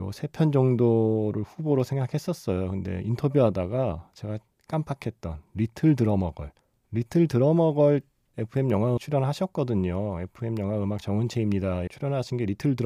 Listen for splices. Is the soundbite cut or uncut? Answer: cut